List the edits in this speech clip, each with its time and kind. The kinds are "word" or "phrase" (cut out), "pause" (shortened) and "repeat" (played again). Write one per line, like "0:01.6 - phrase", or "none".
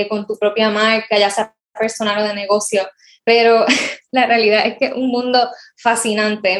none

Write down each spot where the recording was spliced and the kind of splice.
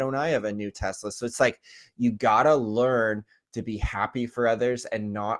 none

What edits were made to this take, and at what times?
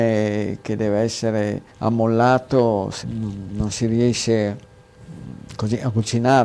0:01.7 - pause
0:03.0 - word

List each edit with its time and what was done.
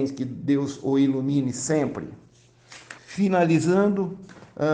0:03.0 - pause

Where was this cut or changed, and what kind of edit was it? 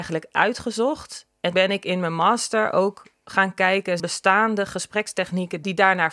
0:01.5 - word
0:04.0 - phrase

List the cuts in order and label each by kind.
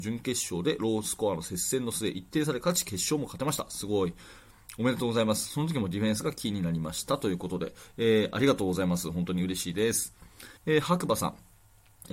0:10.6 - pause

